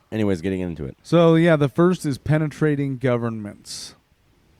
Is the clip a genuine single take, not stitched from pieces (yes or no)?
no